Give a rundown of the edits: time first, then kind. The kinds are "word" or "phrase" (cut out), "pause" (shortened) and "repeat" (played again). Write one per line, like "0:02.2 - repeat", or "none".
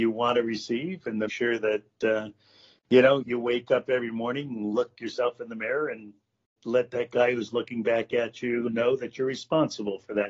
0:01.3 - word
0:03.2 - word
0:06.6 - word
0:08.7 - word